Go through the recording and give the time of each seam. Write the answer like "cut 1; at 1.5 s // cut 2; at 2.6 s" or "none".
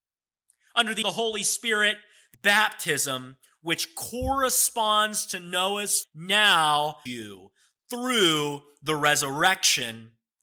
cut 1; at 1.0 s // cut 2; at 2.3 s // cut 3; at 6.0 s // cut 4; at 7.1 s